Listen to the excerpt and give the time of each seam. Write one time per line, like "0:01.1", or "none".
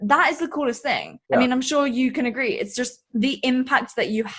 0:01.2
0:03.0